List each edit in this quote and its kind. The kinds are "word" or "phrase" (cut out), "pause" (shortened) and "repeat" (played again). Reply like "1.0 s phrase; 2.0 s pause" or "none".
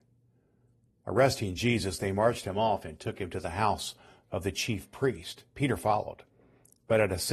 none